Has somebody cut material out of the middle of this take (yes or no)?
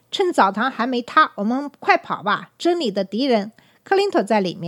yes